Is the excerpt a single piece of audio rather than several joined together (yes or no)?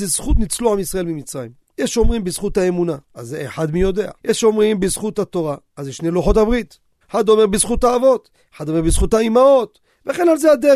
no